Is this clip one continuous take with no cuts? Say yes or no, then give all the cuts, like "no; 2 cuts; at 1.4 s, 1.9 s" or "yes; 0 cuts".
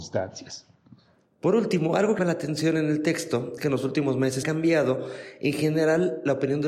no; 3 cuts; at 2.2 s, 3.6 s, 4.4 s